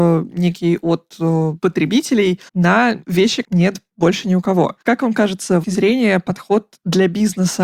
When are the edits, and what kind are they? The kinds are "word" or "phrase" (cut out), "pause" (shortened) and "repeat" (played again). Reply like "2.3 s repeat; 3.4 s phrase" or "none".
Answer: 2.5 s pause; 3.4 s word; 4.8 s pause; 5.6 s phrase